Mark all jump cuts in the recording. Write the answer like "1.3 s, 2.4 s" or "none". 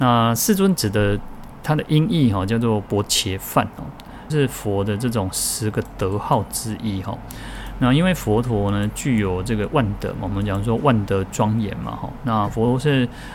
4.3 s